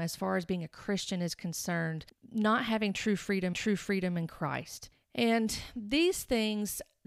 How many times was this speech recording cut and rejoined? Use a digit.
1